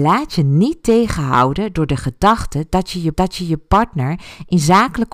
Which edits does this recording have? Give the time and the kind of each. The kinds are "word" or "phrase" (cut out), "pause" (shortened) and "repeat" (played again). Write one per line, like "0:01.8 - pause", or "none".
0:03.1 - repeat